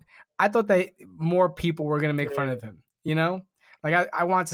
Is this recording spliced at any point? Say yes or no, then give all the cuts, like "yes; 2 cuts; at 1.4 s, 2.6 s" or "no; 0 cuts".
no; 0 cuts